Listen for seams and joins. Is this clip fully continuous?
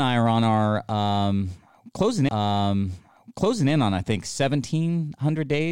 no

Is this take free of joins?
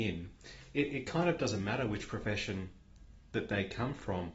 yes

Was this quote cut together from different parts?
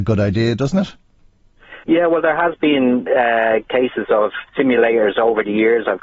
yes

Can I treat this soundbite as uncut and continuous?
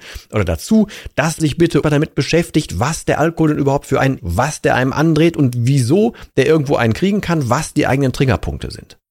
no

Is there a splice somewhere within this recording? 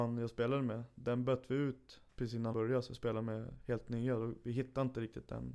yes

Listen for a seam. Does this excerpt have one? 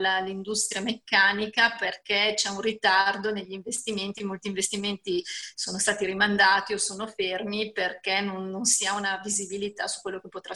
no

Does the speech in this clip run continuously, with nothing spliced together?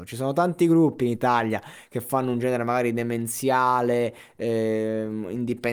yes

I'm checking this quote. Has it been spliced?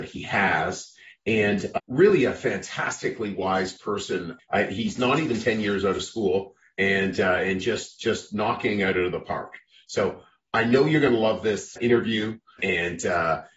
no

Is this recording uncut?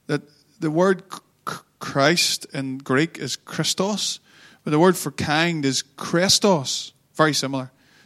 yes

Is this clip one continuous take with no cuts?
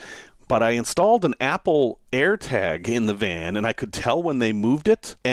yes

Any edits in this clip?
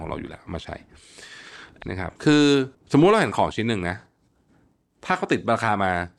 yes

